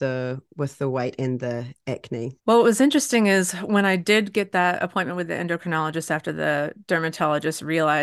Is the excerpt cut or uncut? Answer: cut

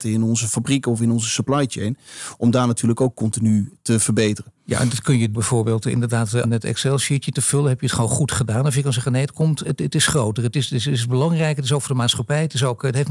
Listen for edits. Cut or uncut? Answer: cut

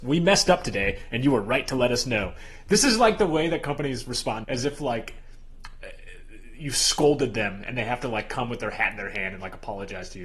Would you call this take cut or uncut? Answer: cut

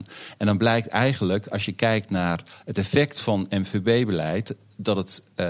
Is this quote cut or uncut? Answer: uncut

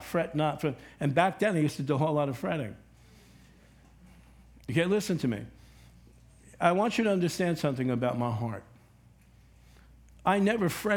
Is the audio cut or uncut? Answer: uncut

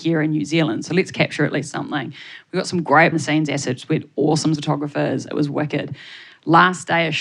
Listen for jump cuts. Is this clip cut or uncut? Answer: cut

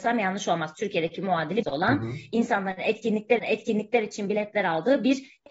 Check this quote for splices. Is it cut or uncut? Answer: cut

